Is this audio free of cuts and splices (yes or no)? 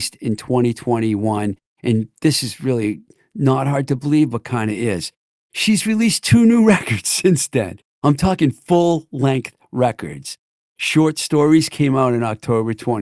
yes